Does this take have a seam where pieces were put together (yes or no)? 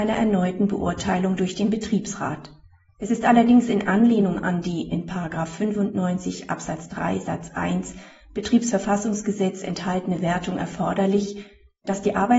no